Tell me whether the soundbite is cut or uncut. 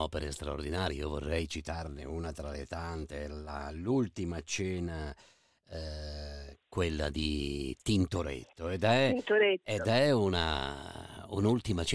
uncut